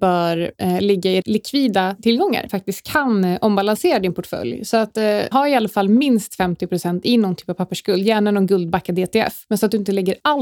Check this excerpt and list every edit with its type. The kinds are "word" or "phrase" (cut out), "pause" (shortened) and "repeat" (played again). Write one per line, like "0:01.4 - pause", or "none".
0:01.2 - word
0:02.5 - phrase
0:05.3 - word